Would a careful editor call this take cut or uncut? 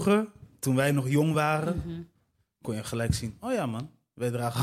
uncut